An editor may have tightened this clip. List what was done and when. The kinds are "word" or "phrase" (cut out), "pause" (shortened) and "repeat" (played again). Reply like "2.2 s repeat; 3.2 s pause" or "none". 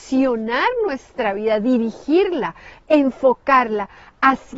none

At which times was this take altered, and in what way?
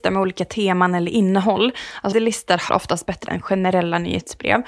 2.1 s word; 2.7 s word; 3.3 s word

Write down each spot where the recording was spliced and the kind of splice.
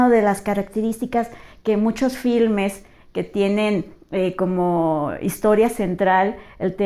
none

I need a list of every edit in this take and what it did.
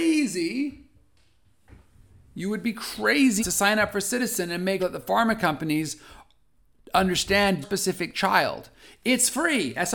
3.4 s word; 4.8 s word; 7.6 s word

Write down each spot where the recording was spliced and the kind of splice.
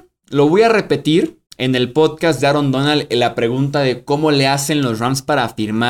1.5 s pause

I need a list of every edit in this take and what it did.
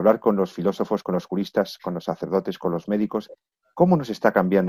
none

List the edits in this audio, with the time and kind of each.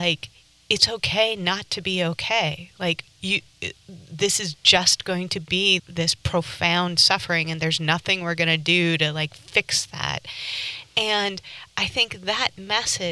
5.8 s word

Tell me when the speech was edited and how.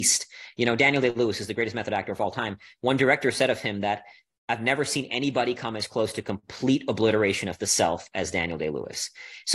none

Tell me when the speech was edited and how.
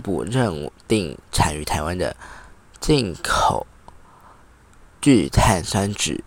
1.2 s pause

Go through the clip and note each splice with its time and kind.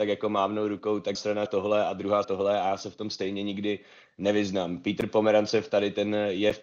1.1 s word; 1.5 s word; 2.2 s word

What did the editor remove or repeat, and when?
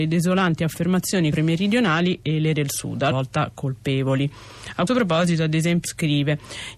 1.3 s word; 2.5 s word; 3.1 s word; 4.9 s word; 5.8 s word

